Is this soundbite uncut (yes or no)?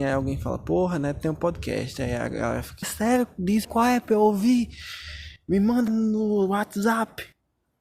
no